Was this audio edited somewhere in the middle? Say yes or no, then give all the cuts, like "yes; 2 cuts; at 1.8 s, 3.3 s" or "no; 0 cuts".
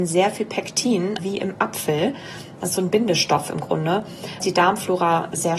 yes; 2 cuts; at 1.2 s, 4.4 s